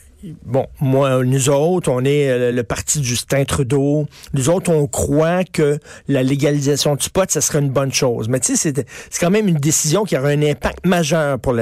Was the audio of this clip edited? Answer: yes; 1 cut; at 2.5 s

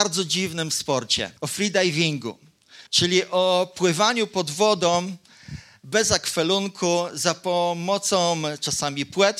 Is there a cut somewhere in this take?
yes; 2 cuts; at 1.4 s, 2.9 s

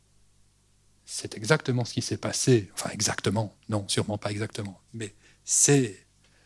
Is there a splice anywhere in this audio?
no; 0 cuts

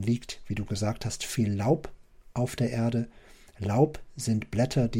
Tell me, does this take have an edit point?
no; 0 cuts

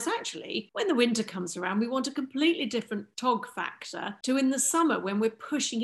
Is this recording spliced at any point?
no; 0 cuts

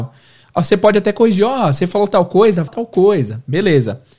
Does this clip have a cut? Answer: yes; 1 cut; at 2.7 s

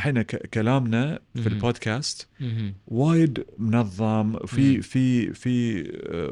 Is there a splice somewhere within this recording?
no; 0 cuts

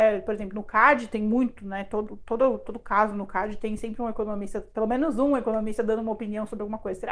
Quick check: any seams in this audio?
no; 0 cuts

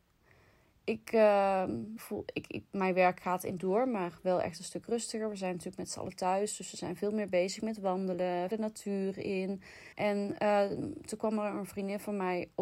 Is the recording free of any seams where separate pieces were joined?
no; 4 cuts; at 2.0 s, 3.6 s, 8.5 s, 9.9 s

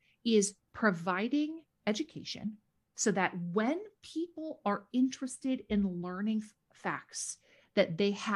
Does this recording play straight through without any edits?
yes; 0 cuts

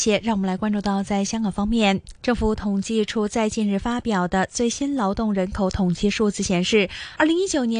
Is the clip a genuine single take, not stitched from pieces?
no; 1 cut; at 2.2 s

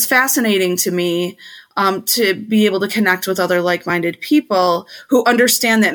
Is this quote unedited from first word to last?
yes; 0 cuts

